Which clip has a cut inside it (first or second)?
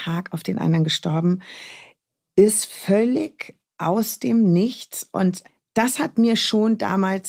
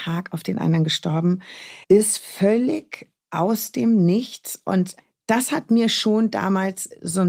second